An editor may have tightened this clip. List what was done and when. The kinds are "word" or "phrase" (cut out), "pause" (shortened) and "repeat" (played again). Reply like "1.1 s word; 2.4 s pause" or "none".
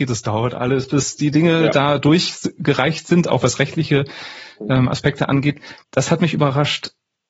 5.8 s pause